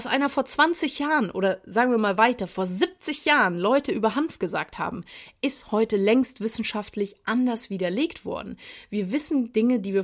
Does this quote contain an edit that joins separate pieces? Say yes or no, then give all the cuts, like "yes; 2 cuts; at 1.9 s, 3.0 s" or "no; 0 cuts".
no; 0 cuts